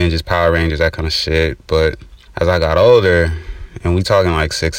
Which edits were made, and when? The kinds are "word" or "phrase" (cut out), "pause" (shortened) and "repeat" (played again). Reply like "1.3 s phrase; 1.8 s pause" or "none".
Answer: 2.2 s pause